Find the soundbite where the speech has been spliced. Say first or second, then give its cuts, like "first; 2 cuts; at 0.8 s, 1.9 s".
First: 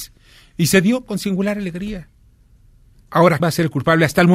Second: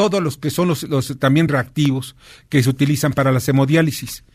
first; 1 cut; at 3.4 s